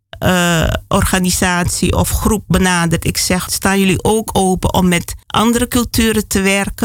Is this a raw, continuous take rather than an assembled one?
no; 2 cuts; at 3.5 s, 5.2 s

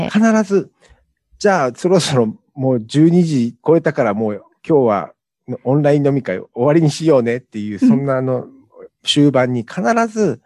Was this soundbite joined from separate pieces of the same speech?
no; 0 cuts

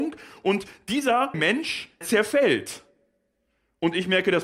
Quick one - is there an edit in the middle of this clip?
yes; 2 cuts; at 1.3 s, 2.0 s

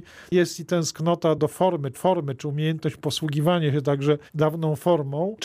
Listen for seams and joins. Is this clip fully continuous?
no; 2 cuts; at 1.9 s, 4.3 s

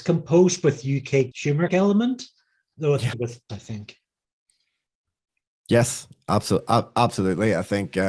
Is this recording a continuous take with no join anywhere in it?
no; 4 cuts; at 1.3 s, 1.7 s, 3.1 s, 3.5 s

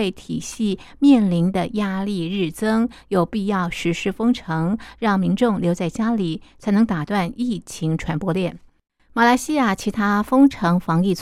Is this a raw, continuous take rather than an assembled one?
yes; 0 cuts

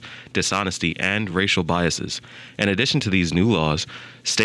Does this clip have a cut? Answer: no; 0 cuts

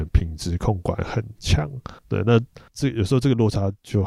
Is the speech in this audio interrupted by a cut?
yes; 2 cuts; at 2.0 s, 2.7 s

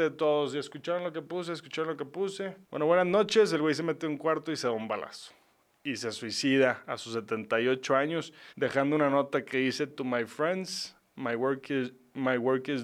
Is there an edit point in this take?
yes; 2 cuts; at 2.6 s, 8.5 s

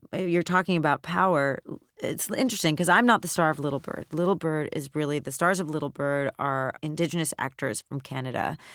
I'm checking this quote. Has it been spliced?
no; 0 cuts

